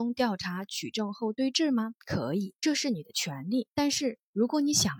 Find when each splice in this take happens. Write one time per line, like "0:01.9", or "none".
0:02.0
0:02.6
0:03.7